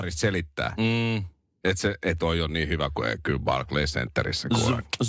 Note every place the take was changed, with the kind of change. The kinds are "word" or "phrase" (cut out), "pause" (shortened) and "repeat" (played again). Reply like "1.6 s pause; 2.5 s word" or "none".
2.2 s word